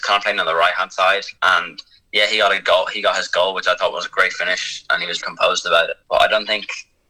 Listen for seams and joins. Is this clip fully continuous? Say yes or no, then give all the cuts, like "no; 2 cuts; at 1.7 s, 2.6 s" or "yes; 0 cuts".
no; 3 cuts; at 1.4 s, 5.2 s, 6.0 s